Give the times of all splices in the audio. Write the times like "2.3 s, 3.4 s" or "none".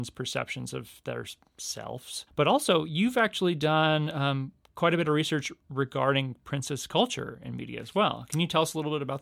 2.3 s